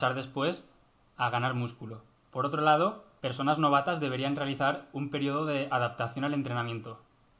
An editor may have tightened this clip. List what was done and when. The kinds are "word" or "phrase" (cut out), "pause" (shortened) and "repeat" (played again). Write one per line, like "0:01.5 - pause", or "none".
0:02.2 - pause
0:03.2 - pause